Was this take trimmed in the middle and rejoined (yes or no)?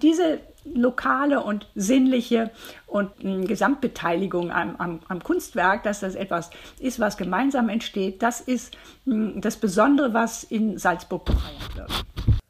yes